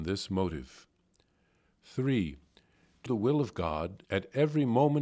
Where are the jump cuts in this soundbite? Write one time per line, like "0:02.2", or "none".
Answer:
0:03.1
0:04.0